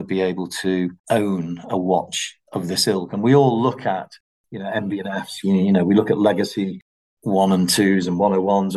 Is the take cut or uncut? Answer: cut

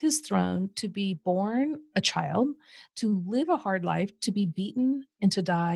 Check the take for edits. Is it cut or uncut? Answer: uncut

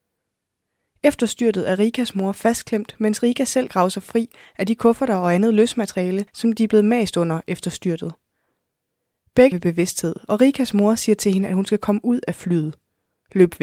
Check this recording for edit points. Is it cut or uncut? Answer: cut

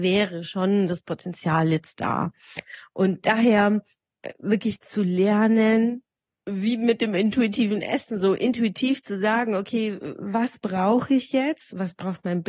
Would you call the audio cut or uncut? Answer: uncut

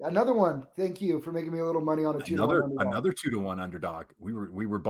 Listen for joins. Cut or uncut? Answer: uncut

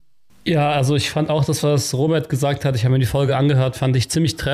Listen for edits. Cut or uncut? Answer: uncut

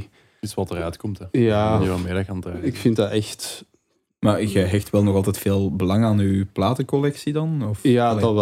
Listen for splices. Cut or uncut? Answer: uncut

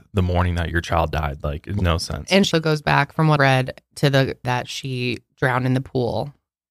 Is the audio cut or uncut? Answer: cut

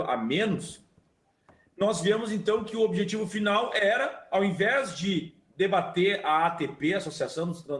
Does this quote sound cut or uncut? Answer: uncut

